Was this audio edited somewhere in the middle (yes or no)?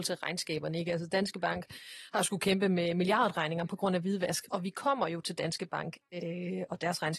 no